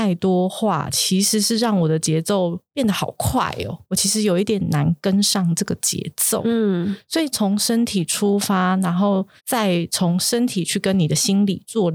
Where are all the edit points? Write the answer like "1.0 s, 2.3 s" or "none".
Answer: 9.4 s